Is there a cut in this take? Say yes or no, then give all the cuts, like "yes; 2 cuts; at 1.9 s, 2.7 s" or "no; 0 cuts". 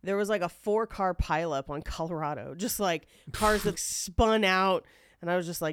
yes; 1 cut; at 3.7 s